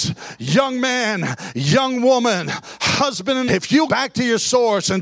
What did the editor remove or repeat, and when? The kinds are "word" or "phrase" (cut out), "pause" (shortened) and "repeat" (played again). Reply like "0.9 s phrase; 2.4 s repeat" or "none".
3.5 s word; 3.9 s word